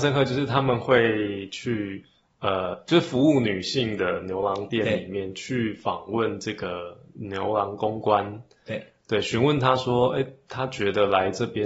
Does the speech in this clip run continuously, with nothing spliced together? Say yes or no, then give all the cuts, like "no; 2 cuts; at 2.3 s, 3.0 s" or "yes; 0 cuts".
yes; 0 cuts